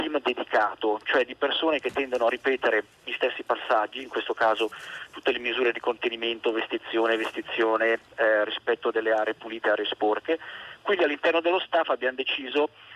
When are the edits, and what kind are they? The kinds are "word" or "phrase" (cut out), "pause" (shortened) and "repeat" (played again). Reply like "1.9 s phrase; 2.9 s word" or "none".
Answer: none